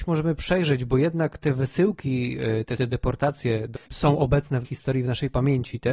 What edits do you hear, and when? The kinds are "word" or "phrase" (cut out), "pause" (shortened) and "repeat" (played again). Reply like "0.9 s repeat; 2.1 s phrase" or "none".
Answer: 2.8 s word; 3.7 s word; 4.6 s word